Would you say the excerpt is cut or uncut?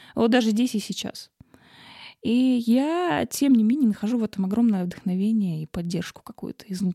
uncut